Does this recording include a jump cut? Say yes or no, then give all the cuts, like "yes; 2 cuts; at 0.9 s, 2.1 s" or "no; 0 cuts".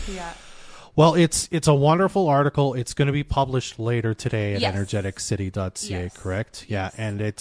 no; 0 cuts